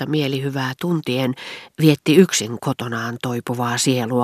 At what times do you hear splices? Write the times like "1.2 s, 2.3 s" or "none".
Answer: none